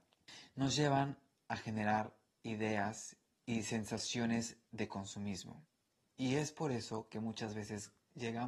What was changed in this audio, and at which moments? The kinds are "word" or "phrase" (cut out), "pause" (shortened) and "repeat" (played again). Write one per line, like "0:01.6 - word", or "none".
none